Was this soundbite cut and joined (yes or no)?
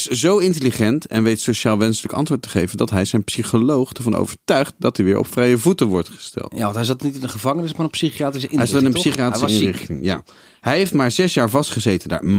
no